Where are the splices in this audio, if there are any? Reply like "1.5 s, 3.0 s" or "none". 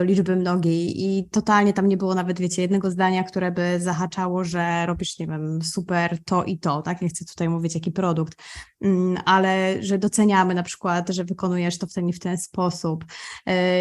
none